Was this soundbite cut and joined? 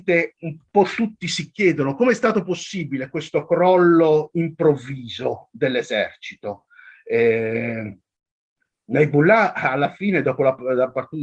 no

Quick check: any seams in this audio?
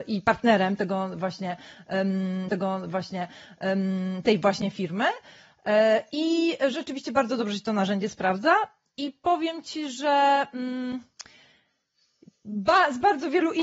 yes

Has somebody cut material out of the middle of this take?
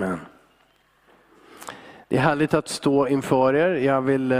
no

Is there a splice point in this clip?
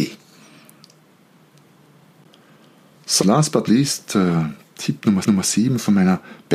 yes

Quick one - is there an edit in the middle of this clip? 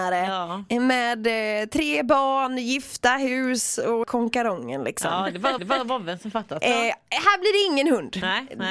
yes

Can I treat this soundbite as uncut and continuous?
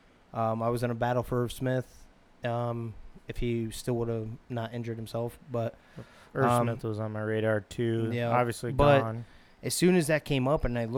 yes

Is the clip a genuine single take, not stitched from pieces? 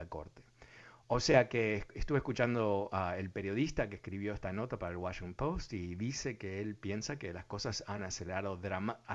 yes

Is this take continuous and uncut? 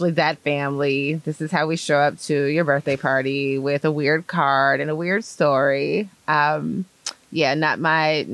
yes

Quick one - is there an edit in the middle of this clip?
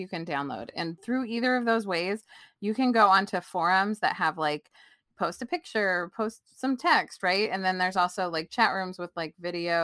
no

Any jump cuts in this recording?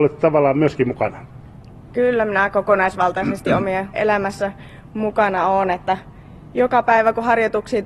yes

